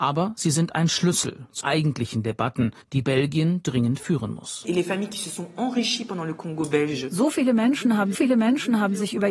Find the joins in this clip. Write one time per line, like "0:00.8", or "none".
0:01.6
0:02.8
0:08.1